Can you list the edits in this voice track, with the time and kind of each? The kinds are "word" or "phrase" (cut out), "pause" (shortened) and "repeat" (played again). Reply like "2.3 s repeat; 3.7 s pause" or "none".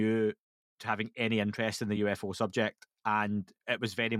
none